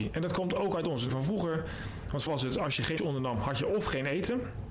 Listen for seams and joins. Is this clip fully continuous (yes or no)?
no